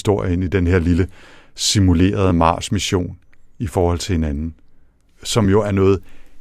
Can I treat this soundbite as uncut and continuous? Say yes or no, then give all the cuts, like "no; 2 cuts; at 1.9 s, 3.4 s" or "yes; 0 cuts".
yes; 0 cuts